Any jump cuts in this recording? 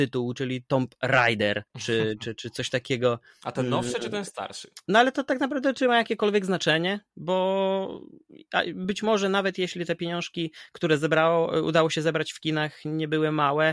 yes; 2 cuts; at 1.7 s, 7.1 s

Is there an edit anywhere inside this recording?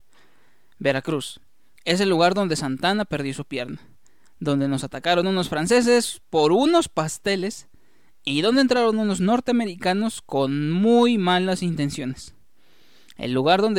no; 0 cuts

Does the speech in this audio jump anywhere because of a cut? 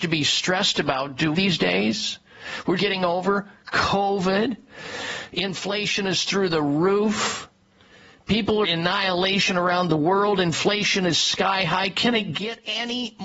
yes; 3 cuts; at 1.3 s, 2.8 s, 8.6 s

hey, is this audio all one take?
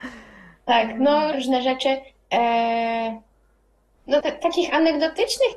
no; 2 cuts; at 1.3 s, 4.2 s

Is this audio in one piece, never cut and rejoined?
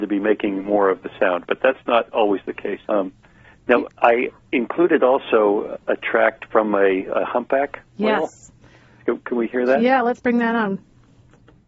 no; 3 cuts; at 2.8 s, 3.9 s, 7.9 s

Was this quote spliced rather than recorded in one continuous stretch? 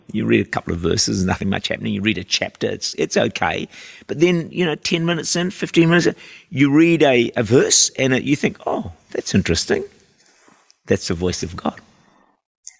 no; 0 cuts

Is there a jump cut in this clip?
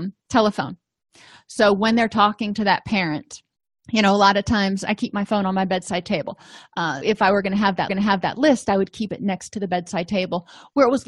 yes; 2 cuts; at 7.0 s, 7.9 s

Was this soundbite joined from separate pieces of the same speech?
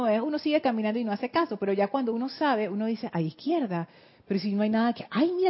no; 0 cuts

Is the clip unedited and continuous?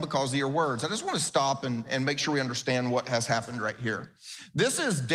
yes; 0 cuts

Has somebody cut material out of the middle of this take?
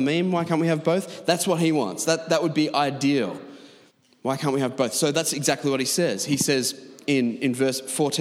yes; 1 cut; at 3.9 s

